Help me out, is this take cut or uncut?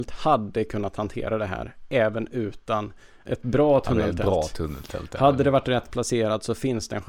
uncut